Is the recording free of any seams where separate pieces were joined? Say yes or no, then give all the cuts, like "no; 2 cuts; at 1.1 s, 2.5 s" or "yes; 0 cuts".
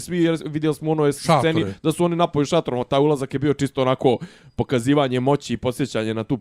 yes; 0 cuts